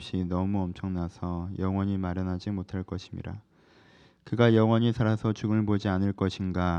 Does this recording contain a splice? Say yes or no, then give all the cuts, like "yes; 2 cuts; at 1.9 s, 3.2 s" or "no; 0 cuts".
no; 0 cuts